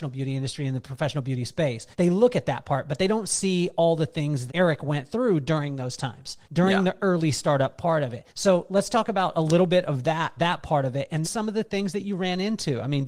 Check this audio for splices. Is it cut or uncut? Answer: cut